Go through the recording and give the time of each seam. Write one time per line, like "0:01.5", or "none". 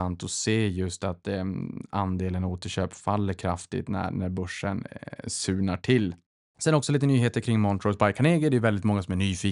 none